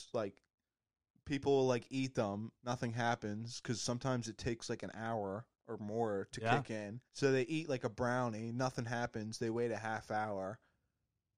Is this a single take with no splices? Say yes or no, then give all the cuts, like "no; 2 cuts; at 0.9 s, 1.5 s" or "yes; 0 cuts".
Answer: no; 3 cuts; at 2.5 s, 5.5 s, 7.1 s